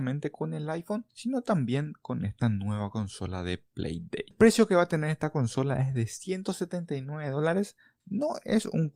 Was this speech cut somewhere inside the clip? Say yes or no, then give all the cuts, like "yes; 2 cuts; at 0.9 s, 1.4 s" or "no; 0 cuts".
no; 0 cuts